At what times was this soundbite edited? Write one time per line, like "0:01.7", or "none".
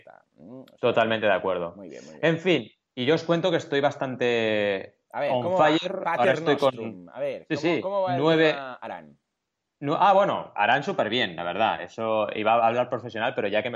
none